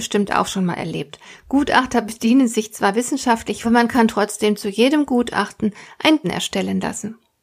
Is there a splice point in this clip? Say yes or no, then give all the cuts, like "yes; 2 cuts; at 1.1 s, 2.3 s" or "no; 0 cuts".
yes; 2 cuts; at 3.6 s, 6.2 s